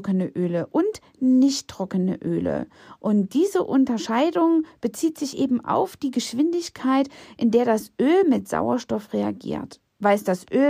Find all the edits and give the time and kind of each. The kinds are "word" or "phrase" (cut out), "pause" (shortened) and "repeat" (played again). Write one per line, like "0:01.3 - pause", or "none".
none